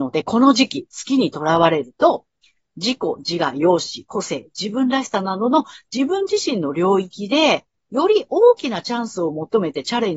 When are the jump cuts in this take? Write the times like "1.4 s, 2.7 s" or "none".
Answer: none